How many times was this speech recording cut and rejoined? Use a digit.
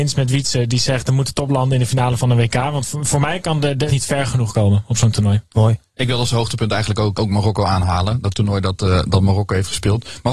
3